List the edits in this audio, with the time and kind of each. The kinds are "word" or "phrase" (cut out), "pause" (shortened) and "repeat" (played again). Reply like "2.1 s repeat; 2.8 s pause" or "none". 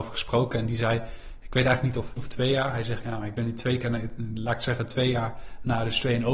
2.2 s word

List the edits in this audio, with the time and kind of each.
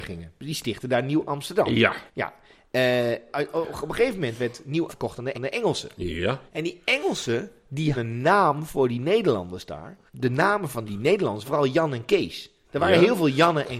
2.1 s pause; 4.9 s word; 5.3 s repeat; 6.5 s pause; 7.9 s word; 10.1 s pause; 10.9 s word; 11.4 s word

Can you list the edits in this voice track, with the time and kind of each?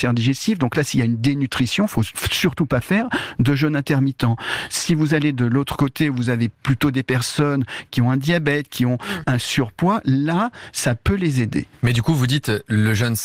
none

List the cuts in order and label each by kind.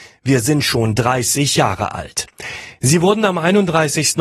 none

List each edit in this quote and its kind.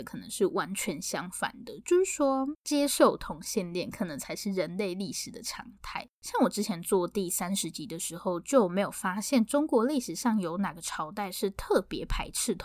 2.6 s pause; 6.1 s pause

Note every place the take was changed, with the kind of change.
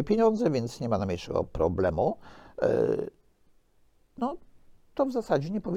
none

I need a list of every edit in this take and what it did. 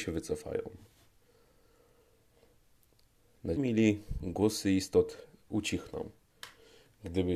3.6 s word

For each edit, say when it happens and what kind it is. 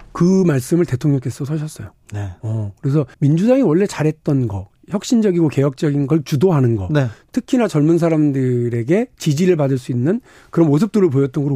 3.1 s pause

